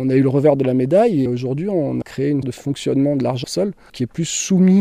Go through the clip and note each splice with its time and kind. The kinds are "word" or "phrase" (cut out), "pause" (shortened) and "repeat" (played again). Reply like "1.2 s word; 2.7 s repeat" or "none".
1.3 s word; 2.0 s word; 2.4 s word; 3.4 s word; 3.9 s word